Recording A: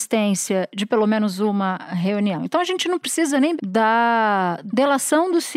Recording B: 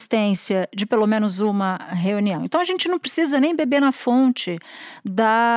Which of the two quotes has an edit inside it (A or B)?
A